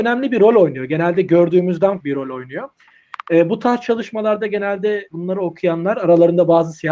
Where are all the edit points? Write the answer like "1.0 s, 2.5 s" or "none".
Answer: 2.0 s, 5.1 s